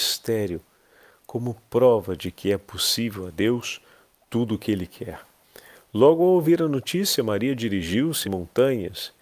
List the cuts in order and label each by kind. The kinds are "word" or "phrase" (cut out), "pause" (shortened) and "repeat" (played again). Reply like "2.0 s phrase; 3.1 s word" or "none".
8.2 s word